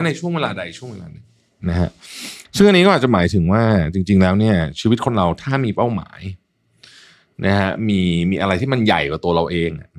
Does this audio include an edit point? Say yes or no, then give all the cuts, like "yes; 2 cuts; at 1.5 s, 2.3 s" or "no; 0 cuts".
no; 0 cuts